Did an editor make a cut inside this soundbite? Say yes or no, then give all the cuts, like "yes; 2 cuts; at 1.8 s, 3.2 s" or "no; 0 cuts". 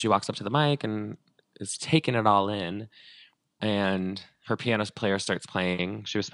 yes; 1 cut; at 1.8 s